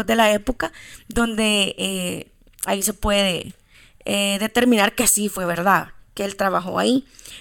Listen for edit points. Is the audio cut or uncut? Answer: uncut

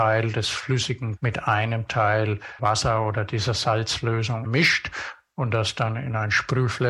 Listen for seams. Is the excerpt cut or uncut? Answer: cut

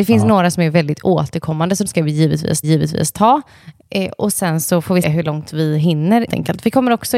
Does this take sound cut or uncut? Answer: cut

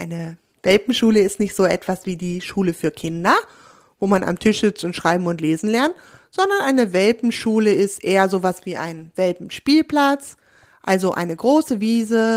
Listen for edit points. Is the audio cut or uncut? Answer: uncut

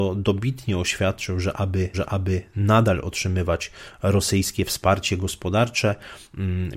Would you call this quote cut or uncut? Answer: cut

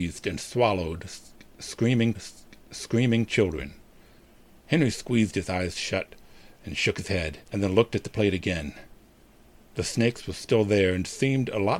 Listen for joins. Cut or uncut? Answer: cut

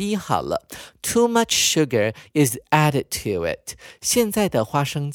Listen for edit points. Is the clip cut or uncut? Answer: uncut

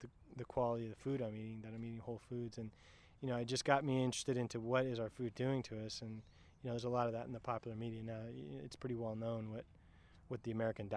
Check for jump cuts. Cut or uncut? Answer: uncut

